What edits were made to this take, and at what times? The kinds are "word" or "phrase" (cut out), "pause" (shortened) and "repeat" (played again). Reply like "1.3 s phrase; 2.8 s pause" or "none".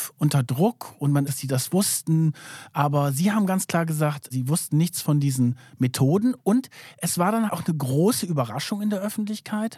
1.3 s phrase; 7.5 s word